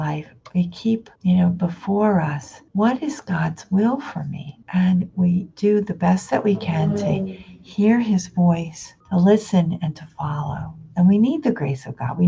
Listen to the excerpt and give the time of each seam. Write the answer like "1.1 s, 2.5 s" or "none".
1.2 s, 2.7 s, 4.6 s, 5.5 s, 9.0 s